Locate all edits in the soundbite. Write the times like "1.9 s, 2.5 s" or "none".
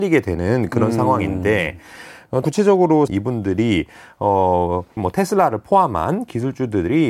2.4 s, 3.1 s, 5.0 s